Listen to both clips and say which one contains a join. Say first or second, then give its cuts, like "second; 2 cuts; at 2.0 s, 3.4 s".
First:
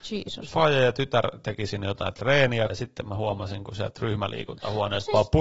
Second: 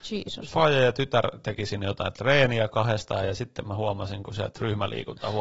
first; 1 cut; at 2.7 s